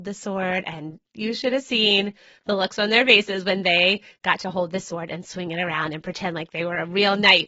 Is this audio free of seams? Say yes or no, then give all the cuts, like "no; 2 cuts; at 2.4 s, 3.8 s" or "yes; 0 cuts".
yes; 0 cuts